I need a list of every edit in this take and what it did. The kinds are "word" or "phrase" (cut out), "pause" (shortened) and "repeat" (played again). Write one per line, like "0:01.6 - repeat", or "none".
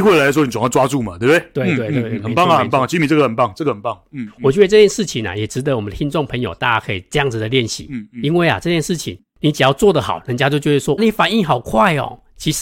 0:11.0 - word